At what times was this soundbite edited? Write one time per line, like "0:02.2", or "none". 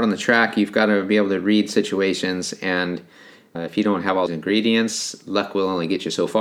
0:03.5
0:04.3